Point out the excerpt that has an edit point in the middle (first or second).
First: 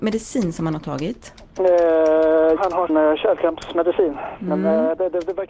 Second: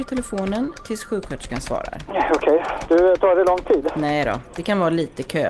first